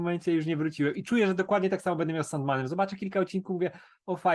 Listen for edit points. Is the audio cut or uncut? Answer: uncut